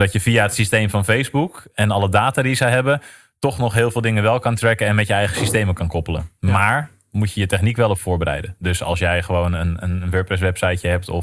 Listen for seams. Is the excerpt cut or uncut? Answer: uncut